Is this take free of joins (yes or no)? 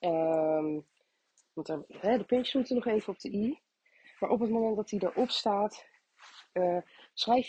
yes